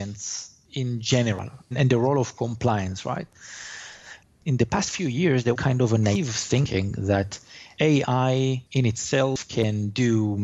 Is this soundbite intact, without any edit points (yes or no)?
no